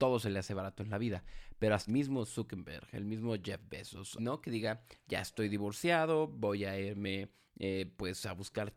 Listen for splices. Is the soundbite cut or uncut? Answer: cut